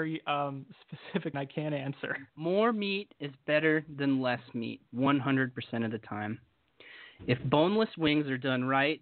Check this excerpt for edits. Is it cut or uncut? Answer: cut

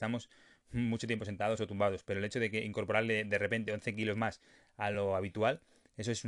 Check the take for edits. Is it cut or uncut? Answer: uncut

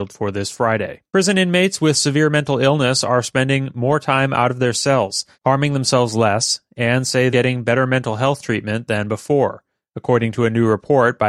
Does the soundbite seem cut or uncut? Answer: cut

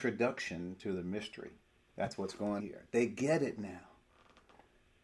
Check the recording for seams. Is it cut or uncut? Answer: cut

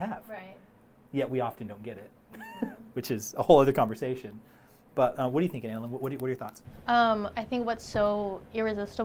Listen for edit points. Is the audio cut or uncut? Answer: uncut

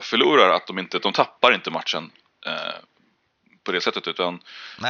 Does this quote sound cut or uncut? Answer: uncut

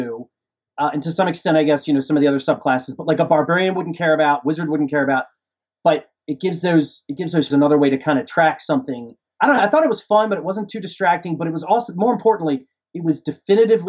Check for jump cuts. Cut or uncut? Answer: cut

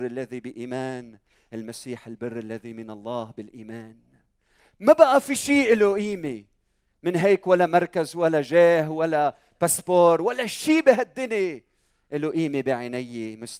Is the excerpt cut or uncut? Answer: uncut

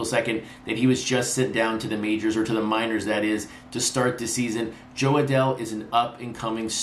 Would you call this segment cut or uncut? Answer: uncut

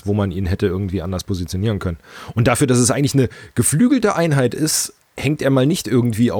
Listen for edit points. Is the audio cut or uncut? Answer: uncut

